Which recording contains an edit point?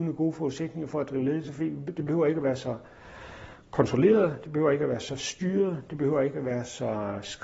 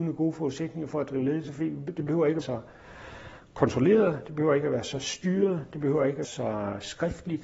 second; 2 cuts; at 2.4 s, 6.2 s

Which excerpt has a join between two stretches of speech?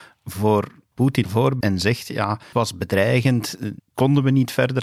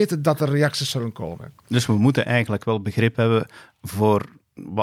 first; 5 cuts; at 0.9 s, 1.2 s, 1.6 s, 2.5 s, 3.8 s

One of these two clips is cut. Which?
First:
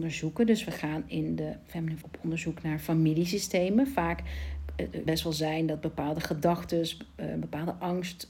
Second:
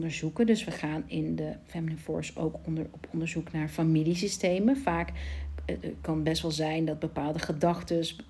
first; 2 cuts; at 2.0 s, 5.1 s

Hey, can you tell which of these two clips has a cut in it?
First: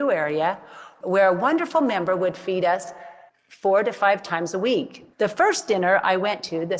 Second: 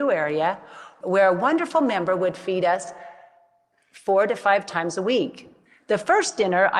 first; 2 cuts; at 3.3 s, 5.1 s

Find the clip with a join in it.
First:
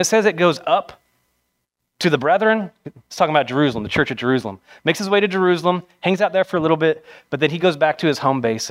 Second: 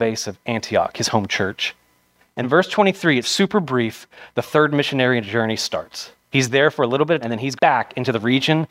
second; 5 cuts; at 2.4 s, 3.2 s, 6.2 s, 7.2 s, 7.6 s

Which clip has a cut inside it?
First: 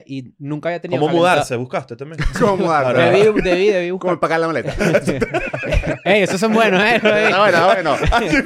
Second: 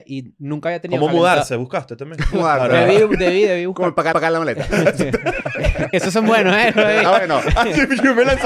second; 4 cuts; at 2.3 s, 4.1 s, 5.9 s, 7.1 s

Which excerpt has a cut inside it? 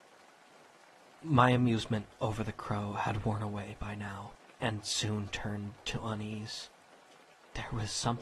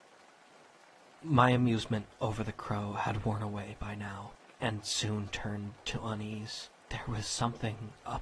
second; 1 cut; at 6.8 s

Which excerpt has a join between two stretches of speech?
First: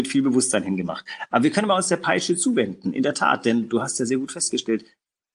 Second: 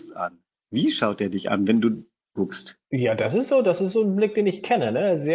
second; 2 cuts; at 2.4 s, 2.8 s

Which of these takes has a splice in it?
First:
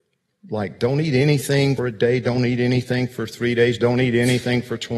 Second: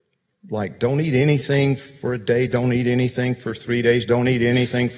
first; 1 cut; at 1.8 s

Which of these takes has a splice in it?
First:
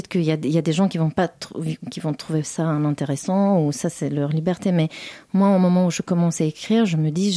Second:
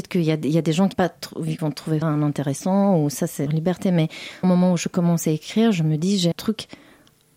second; 6 cuts; at 0.9 s, 1.6 s, 2.0 s, 3.5 s, 4.4 s, 6.3 s

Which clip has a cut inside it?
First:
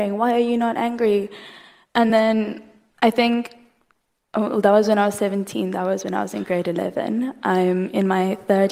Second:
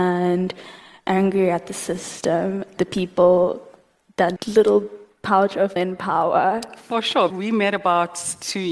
second; 4 cuts; at 2.8 s, 4.4 s, 5.8 s, 7.3 s

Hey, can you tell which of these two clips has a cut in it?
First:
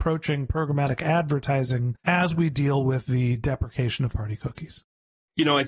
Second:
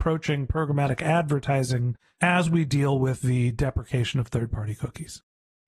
first; 2 cuts; at 2.0 s, 4.1 s

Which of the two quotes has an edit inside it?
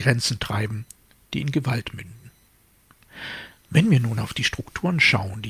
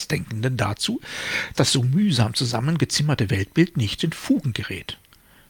second; 2 cuts; at 1.5 s, 4.0 s

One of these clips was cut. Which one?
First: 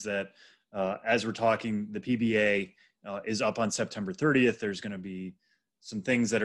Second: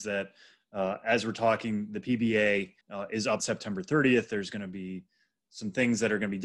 second; 2 cuts; at 2.8 s, 3.4 s

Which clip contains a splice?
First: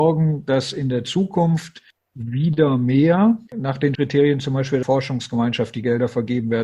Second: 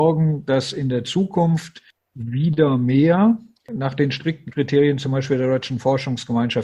first; 3 cuts; at 3.5 s, 3.9 s, 4.8 s

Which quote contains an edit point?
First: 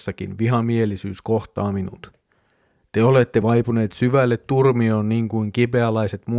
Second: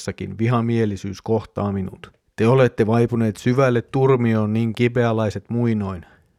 second; 2 cuts; at 2.3 s, 4.7 s

